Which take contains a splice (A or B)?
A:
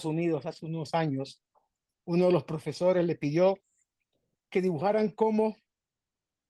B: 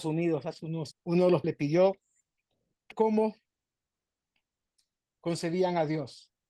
B